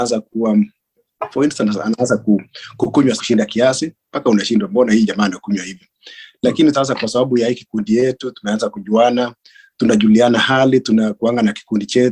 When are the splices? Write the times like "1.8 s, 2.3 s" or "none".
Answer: 3.2 s, 6.7 s